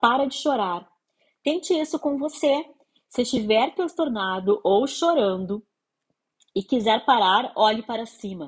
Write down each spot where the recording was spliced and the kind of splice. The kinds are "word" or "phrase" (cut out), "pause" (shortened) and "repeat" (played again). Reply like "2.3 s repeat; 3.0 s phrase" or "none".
none

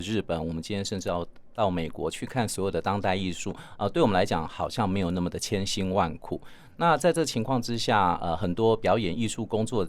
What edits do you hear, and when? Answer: none

